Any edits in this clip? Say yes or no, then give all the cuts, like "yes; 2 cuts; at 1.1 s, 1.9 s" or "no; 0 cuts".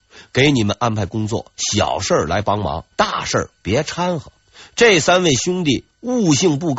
yes; 3 cuts; at 1.5 s, 2.9 s, 4.4 s